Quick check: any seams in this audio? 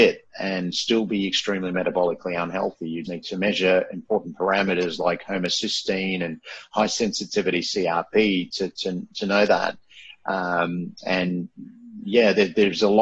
yes; 1 cut; at 3.0 s

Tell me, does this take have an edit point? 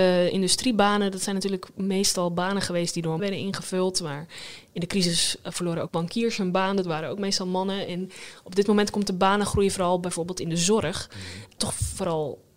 yes; 3 cuts; at 3.2 s, 5.9 s, 11.6 s

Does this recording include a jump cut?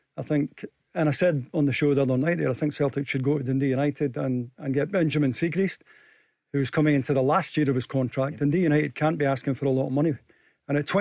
no; 0 cuts

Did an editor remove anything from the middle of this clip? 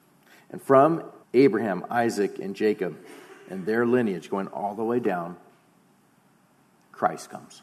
yes; 1 cut; at 1.2 s

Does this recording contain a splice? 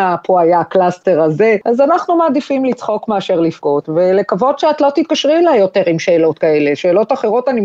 no; 0 cuts

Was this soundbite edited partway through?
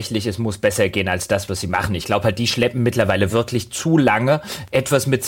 no; 0 cuts

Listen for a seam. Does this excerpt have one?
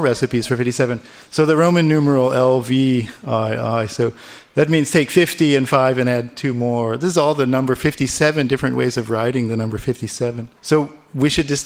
yes; 1 cut; at 10.6 s

